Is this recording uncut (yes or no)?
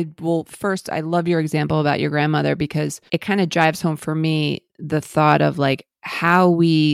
no